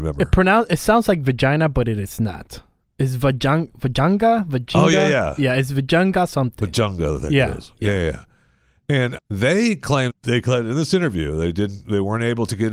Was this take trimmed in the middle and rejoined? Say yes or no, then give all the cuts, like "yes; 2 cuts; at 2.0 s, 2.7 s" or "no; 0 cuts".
yes; 2 cuts; at 9.2 s, 10.1 s